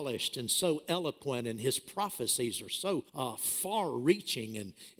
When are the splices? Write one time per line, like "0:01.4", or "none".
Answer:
0:03.1